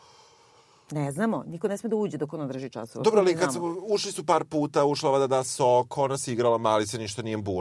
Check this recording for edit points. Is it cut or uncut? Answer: uncut